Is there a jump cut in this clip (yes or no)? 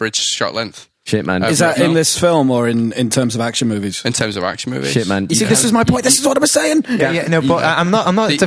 no